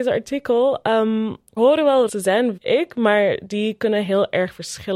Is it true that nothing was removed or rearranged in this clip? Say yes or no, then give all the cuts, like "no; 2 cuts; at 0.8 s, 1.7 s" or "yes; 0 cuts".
no; 3 cuts; at 1.6 s, 2.1 s, 2.6 s